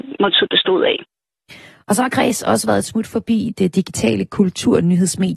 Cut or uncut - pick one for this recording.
uncut